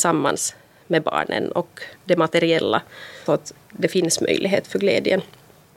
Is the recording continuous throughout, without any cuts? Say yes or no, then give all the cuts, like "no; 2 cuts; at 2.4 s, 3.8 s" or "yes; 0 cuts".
no; 3 cuts; at 2.0 s, 3.3 s, 3.6 s